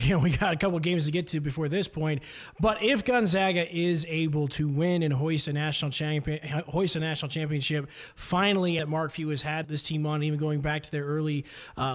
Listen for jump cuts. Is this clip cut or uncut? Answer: cut